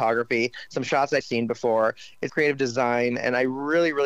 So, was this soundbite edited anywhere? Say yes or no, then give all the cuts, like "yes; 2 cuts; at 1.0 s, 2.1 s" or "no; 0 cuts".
yes; 2 cuts; at 1.2 s, 2.3 s